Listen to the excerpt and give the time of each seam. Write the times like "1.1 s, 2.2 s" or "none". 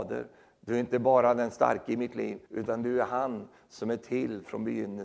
2.4 s